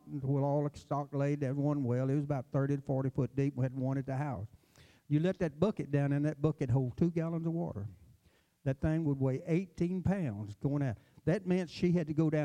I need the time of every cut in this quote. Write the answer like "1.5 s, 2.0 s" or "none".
none